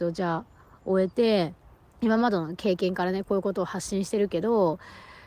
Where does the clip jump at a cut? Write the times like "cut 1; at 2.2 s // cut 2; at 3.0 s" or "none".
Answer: cut 1; at 1.7 s